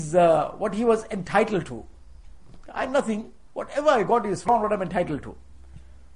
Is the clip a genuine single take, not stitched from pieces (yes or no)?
no